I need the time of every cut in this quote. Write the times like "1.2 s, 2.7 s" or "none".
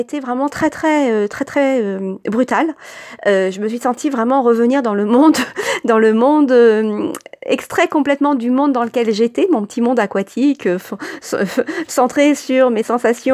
none